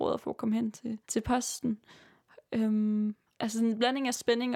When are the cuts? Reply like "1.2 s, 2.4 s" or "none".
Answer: 1.0 s, 3.3 s